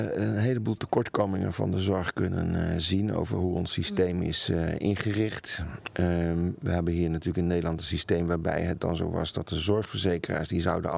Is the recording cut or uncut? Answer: uncut